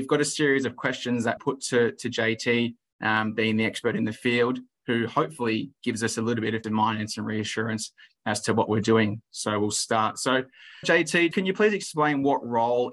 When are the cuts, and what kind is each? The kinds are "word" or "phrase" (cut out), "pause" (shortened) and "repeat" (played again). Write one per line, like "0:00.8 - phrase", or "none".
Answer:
0:01.4 - word
0:06.6 - word
0:10.8 - word
0:11.3 - word